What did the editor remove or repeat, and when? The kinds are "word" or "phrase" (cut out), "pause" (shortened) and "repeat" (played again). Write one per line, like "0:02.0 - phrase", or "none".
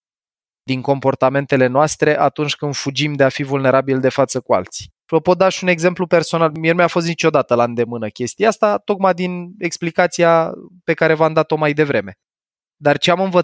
0:05.0 - pause